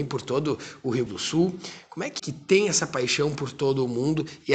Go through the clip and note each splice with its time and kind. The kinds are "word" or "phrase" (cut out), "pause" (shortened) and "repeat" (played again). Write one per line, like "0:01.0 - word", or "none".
0:01.1 - word
0:02.2 - phrase